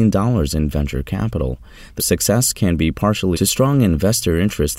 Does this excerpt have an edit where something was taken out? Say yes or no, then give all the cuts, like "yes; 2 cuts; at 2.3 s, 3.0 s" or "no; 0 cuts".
yes; 2 cuts; at 2.0 s, 3.3 s